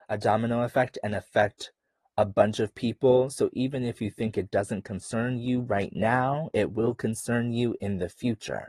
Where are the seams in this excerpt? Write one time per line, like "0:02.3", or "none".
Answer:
none